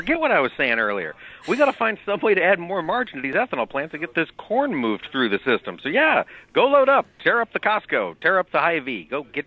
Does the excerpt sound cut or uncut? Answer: uncut